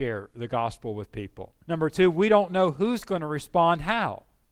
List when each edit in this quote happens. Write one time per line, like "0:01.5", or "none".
0:01.6